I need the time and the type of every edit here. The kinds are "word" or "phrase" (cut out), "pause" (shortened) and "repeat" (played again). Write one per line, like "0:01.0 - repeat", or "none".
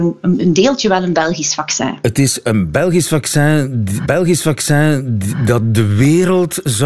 0:04.0 - repeat